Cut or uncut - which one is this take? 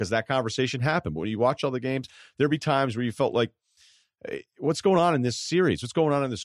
uncut